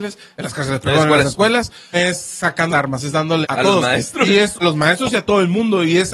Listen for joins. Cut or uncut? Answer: cut